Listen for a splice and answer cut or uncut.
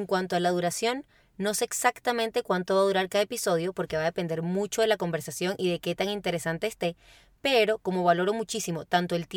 uncut